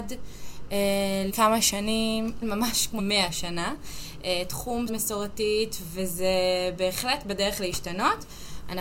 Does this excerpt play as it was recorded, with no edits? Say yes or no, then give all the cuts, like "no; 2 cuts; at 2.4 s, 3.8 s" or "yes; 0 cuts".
no; 4 cuts; at 1.3 s, 2.4 s, 3.0 s, 4.9 s